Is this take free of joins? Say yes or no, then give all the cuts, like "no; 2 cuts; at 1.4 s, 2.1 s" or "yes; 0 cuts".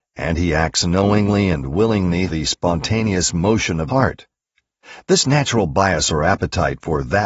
no; 2 cuts; at 2.3 s, 3.9 s